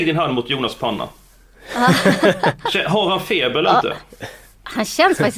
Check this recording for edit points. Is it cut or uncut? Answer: uncut